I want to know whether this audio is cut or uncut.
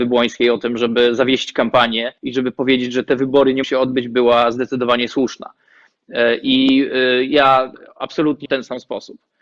cut